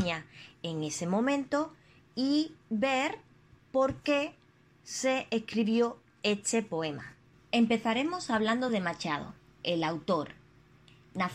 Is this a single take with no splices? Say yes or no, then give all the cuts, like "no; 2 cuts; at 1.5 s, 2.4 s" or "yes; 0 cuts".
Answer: yes; 0 cuts